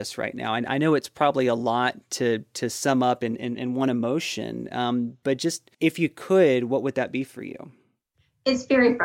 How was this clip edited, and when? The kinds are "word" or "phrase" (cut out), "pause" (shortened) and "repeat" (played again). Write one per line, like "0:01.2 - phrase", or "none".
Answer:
0:05.7 - pause